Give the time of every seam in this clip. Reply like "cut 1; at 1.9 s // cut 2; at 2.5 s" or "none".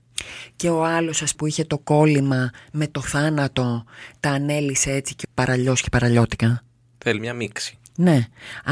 cut 1; at 1.3 s // cut 2; at 5.2 s